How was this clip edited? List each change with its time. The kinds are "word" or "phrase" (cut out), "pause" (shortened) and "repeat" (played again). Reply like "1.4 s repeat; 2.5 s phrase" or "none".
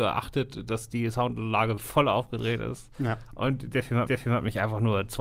1.8 s word; 4.1 s repeat